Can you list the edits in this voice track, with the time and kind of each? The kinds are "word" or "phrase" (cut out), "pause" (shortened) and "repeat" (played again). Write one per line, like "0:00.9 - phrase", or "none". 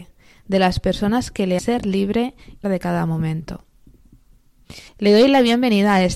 0:01.6 - word
0:02.6 - word
0:04.9 - pause